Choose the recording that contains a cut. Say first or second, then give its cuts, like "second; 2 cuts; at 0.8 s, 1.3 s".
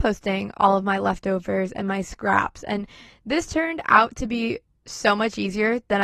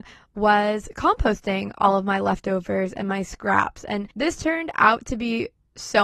second; 1 cut; at 4.1 s